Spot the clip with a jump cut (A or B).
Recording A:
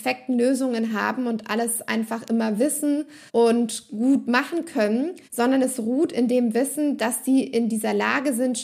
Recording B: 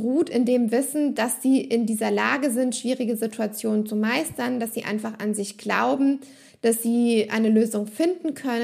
A